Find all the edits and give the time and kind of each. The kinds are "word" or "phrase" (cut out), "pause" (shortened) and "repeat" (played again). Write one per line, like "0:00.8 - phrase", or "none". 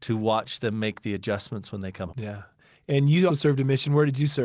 0:02.1 - word
0:03.3 - word